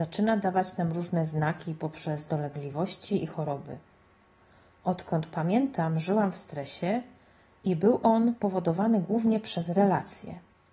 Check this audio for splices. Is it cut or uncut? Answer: uncut